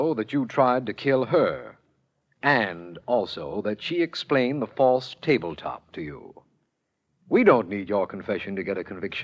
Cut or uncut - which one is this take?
uncut